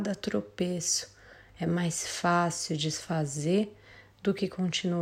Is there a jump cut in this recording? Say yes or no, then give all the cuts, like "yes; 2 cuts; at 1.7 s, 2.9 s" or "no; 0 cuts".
no; 0 cuts